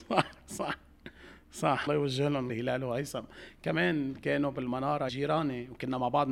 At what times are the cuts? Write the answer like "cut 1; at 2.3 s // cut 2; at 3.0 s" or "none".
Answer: cut 1; at 1.9 s // cut 2; at 2.5 s // cut 3; at 5.1 s

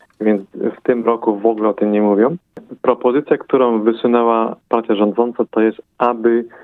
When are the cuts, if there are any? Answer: none

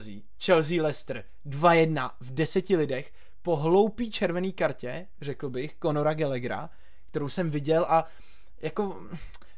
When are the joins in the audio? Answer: none

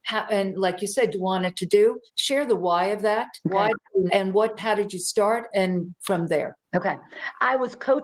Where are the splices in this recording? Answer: cut 1; at 1.1 s // cut 2; at 2.1 s // cut 3; at 3.4 s // cut 4; at 4.1 s // cut 5; at 4.6 s // cut 6; at 5.5 s // cut 7; at 6.6 s

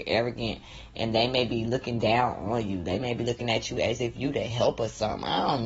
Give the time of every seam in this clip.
none

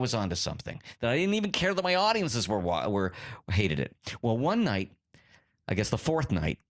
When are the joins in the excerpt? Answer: none

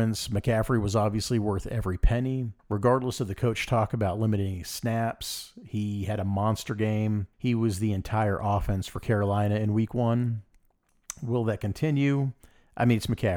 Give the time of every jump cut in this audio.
cut 1; at 2.6 s // cut 2; at 7.3 s

